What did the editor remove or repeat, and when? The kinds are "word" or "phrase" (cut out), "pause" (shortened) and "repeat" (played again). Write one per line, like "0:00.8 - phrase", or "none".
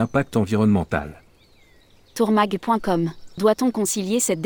none